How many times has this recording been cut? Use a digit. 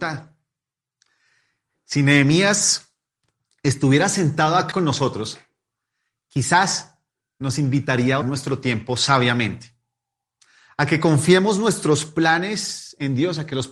2